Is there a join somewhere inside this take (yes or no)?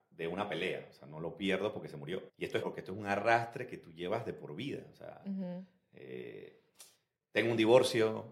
yes